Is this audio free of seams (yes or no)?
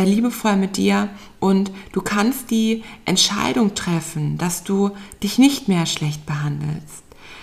yes